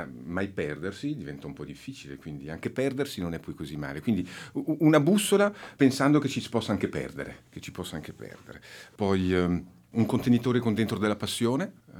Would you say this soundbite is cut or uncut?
uncut